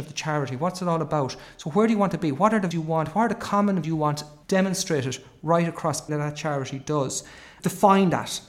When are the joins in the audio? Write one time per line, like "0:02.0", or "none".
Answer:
0:02.7
0:03.8
0:06.1